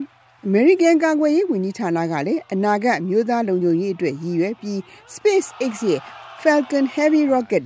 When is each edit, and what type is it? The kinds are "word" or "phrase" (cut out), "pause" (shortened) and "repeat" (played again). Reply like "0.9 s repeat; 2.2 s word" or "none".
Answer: none